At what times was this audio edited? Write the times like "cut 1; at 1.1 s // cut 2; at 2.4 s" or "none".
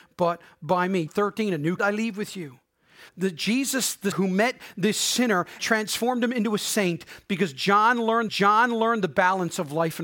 cut 1; at 1.1 s // cut 2; at 1.8 s // cut 3; at 3.1 s // cut 4; at 4.1 s // cut 5; at 5.6 s // cut 6; at 8.3 s